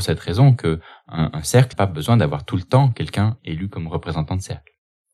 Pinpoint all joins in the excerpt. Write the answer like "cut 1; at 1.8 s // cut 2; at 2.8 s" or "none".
cut 1; at 1.7 s